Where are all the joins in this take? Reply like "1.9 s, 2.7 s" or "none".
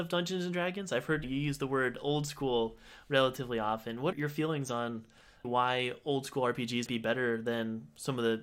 4.1 s, 6.9 s

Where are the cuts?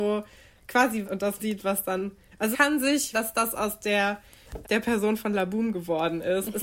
1.0 s, 1.4 s, 2.5 s, 3.1 s, 4.6 s

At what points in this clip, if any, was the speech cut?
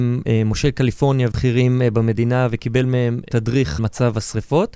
1.3 s, 3.8 s

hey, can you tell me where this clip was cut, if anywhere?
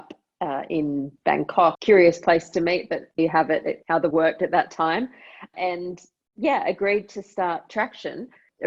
1.7 s, 3.2 s, 4.1 s

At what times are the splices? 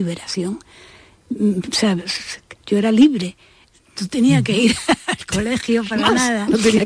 2.6 s

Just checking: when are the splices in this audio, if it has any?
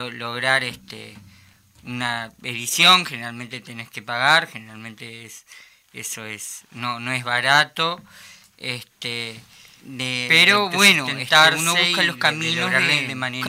none

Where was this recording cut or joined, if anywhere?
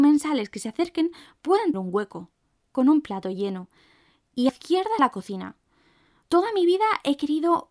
1.7 s, 2.6 s, 4.5 s, 5.0 s

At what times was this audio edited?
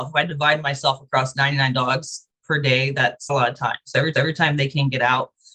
3.3 s, 4.1 s

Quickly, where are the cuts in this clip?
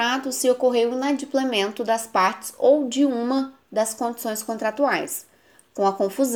none

